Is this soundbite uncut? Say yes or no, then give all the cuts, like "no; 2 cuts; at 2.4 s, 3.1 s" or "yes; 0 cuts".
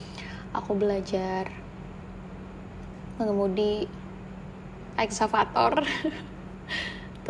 no; 1 cut; at 4.9 s